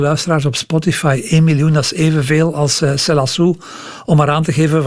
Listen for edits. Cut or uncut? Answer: uncut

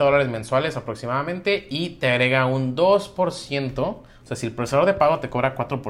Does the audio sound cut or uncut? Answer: uncut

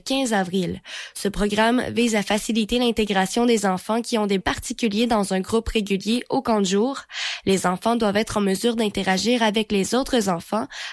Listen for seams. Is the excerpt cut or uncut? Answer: cut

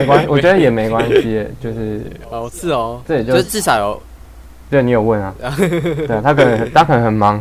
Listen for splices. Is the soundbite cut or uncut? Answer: cut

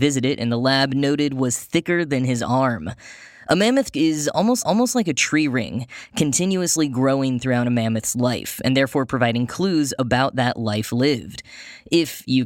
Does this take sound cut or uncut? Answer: cut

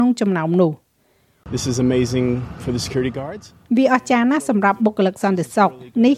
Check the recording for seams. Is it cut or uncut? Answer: uncut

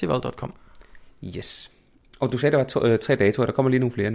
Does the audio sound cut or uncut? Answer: uncut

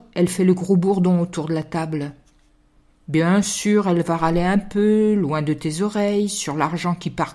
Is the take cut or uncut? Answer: uncut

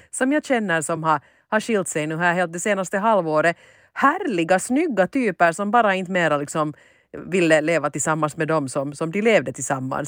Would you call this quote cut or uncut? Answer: uncut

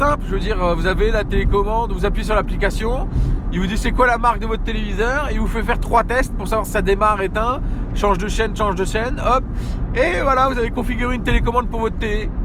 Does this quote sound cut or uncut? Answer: uncut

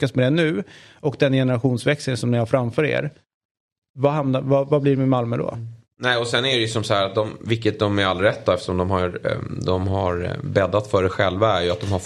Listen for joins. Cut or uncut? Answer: uncut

